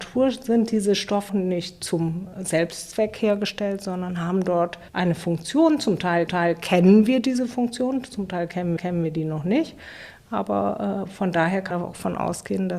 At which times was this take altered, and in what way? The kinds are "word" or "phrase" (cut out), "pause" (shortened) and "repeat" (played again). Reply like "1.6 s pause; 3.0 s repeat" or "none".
1.3 s phrase; 4.9 s pause; 6.3 s repeat; 8.8 s repeat; 11.7 s word